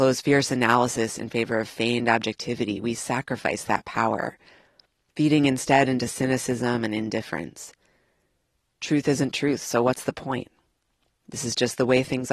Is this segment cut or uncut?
uncut